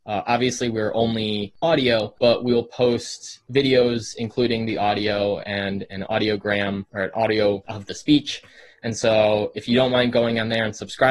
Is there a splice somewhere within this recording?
yes; 1 cut; at 7.6 s

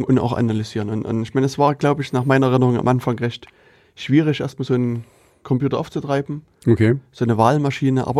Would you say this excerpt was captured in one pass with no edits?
yes; 0 cuts

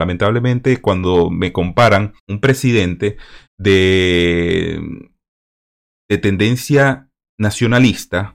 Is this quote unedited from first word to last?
no; 2 cuts; at 2.2 s, 3.5 s

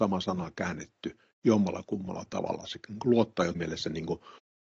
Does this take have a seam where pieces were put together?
yes; 1 cut; at 3.5 s

